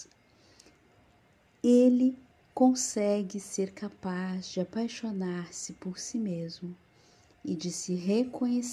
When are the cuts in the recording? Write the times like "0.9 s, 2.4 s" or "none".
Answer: 2.3 s